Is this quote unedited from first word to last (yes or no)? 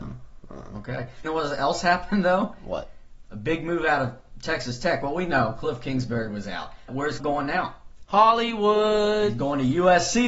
no